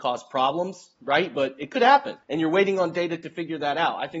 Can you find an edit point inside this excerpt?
yes; 1 cut; at 2.2 s

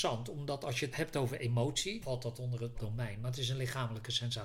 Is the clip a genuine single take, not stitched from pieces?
no; 3 cuts; at 0.9 s, 2.0 s, 2.7 s

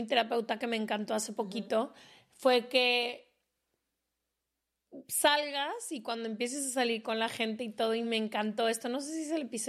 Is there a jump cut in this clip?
no; 0 cuts

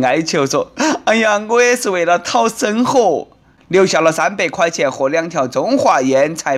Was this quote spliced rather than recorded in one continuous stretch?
no; 0 cuts

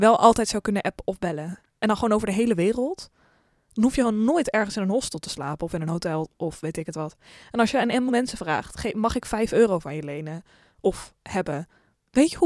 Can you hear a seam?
yes; 1 cut; at 8.1 s

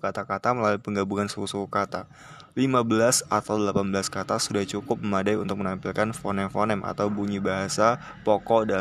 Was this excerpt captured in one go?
yes; 0 cuts

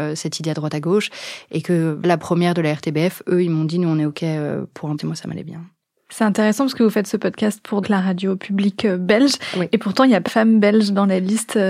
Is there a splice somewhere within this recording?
yes; 4 cuts; at 2.0 s, 5.0 s, 7.8 s, 10.3 s

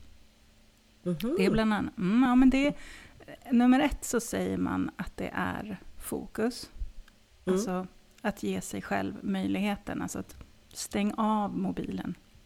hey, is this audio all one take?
yes; 0 cuts

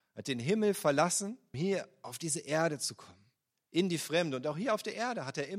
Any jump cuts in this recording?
yes; 1 cut; at 1.5 s

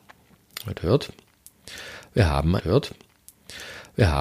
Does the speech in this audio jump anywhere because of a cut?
yes; 1 cut; at 2.6 s

